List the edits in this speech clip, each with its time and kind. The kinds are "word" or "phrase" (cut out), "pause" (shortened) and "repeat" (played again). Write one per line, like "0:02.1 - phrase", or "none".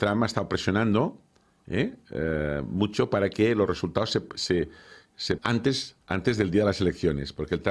0:04.3 - word
0:05.4 - word
0:06.0 - pause